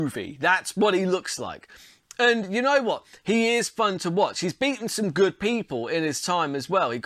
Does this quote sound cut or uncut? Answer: uncut